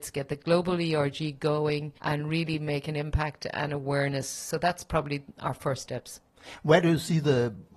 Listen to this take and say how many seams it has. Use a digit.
1